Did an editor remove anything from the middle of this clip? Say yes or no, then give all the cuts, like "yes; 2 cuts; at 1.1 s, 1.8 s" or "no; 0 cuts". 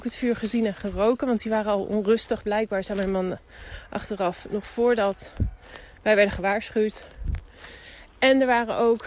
no; 0 cuts